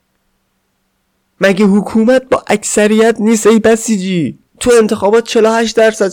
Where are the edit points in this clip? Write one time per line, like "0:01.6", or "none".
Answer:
0:04.5